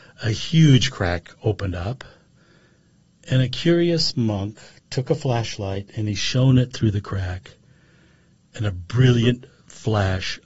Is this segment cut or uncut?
uncut